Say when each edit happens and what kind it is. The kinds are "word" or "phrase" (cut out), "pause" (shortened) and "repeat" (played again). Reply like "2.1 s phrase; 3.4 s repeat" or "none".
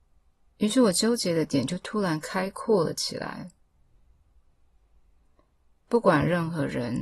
none